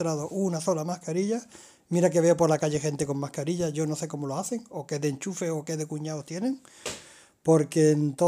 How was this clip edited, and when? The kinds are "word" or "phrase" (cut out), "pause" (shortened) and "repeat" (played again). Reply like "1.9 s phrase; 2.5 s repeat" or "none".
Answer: none